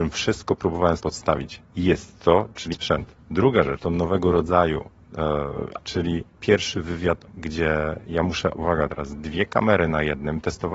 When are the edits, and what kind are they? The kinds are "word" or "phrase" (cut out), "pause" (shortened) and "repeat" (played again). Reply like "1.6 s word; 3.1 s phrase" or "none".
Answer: 1.0 s word; 2.7 s word; 3.8 s word; 5.8 s word; 7.3 s word; 8.5 s word